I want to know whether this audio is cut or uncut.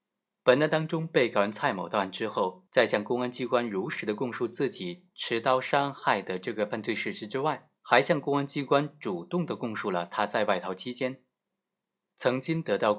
cut